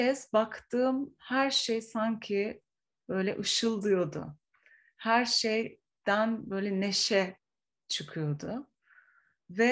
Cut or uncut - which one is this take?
uncut